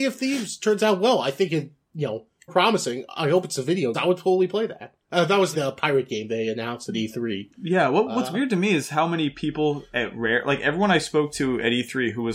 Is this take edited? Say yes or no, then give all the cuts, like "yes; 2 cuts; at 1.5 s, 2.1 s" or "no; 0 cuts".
yes; 4 cuts; at 2.5 s, 3.9 s, 5.0 s, 5.5 s